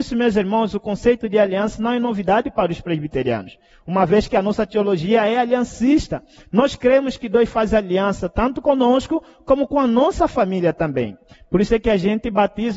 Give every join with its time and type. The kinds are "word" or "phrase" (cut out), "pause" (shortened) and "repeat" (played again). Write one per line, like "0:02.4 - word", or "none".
none